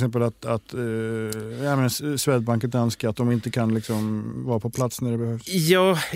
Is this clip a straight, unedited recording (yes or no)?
yes